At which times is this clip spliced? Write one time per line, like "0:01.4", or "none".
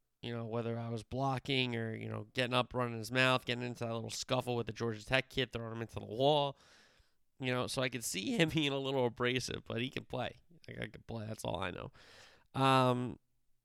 0:08.5